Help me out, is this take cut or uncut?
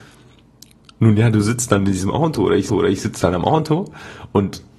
cut